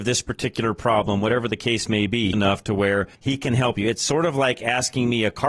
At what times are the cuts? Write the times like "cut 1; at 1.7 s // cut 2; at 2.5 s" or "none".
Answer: cut 1; at 2.3 s // cut 2; at 3.1 s